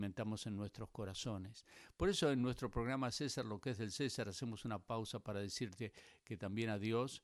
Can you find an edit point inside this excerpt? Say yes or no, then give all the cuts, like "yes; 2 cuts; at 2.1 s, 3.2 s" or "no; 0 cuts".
no; 0 cuts